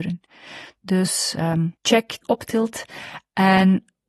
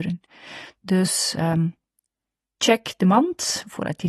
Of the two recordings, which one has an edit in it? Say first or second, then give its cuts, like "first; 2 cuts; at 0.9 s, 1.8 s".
first; 2 cuts; at 1.8 s, 2.2 s